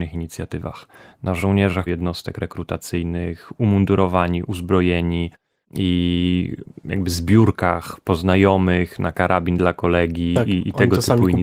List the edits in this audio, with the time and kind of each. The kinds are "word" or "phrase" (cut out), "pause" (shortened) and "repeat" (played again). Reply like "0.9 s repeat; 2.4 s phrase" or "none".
1.9 s phrase; 5.6 s pause